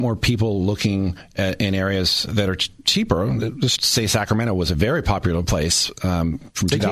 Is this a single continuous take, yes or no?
no